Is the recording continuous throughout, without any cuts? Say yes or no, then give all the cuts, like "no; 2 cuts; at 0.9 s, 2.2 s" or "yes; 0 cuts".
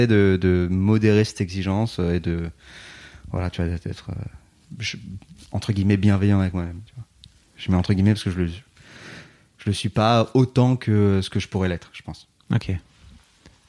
yes; 0 cuts